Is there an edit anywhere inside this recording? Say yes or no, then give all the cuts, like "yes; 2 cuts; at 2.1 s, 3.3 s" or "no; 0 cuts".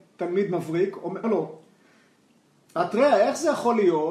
yes; 1 cut; at 1.2 s